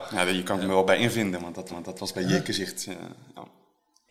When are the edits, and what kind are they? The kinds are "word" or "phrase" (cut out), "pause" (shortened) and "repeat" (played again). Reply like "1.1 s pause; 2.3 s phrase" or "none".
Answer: 1.7 s repeat